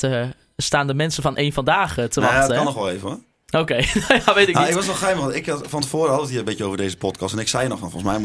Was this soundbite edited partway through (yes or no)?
no